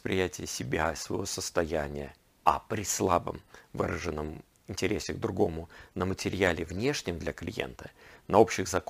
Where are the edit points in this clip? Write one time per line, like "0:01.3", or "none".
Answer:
0:02.3